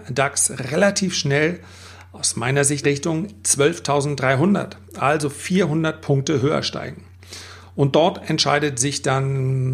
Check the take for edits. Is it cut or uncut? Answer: cut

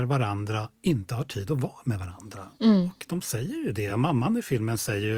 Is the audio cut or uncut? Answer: uncut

